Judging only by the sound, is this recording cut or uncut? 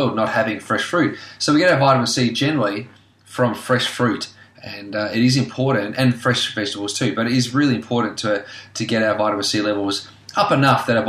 uncut